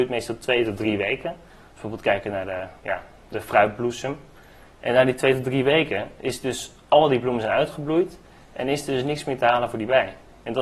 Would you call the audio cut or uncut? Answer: uncut